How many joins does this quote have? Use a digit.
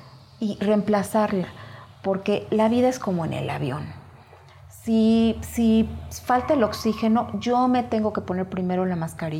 0